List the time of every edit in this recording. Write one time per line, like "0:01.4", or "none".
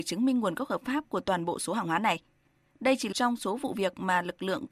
0:03.1